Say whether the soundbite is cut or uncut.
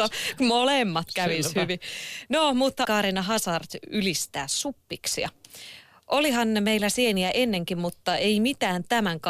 cut